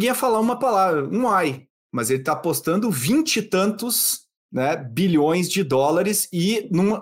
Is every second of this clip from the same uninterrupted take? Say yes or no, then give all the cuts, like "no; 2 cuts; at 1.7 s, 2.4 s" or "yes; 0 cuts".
yes; 0 cuts